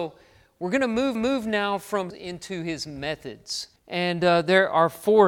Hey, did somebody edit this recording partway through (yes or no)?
yes